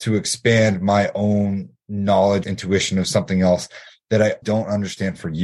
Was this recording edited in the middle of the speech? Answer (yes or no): yes